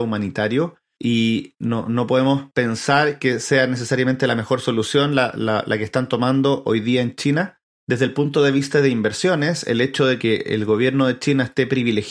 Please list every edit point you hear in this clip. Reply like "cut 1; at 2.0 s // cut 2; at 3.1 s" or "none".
none